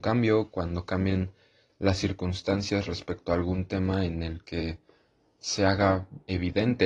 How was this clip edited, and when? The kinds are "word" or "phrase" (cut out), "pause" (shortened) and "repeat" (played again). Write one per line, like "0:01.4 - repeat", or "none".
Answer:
none